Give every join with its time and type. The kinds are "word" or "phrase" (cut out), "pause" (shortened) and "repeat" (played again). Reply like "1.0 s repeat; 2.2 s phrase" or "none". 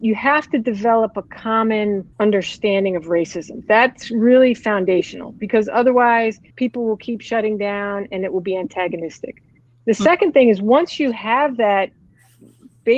2.1 s pause; 6.5 s pause; 9.7 s pause